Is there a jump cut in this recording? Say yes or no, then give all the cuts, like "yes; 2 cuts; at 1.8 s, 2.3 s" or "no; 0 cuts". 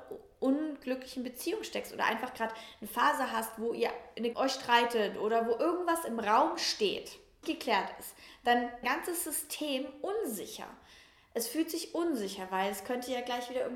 yes; 3 cuts; at 4.3 s, 7.4 s, 8.8 s